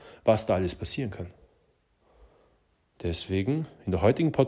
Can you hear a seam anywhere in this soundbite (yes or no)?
no